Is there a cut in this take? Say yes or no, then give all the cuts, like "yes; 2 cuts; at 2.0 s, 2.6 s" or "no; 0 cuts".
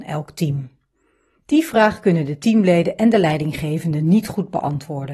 no; 0 cuts